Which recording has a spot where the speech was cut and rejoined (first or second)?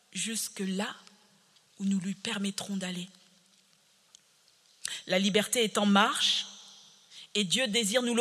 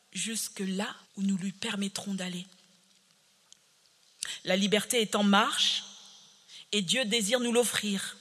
second